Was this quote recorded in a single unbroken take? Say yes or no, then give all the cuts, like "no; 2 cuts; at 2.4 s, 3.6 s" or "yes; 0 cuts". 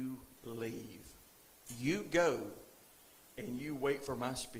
yes; 0 cuts